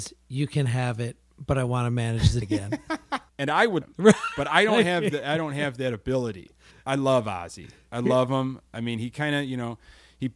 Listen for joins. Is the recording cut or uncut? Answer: cut